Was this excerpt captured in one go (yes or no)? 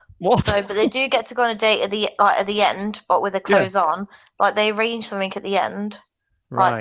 yes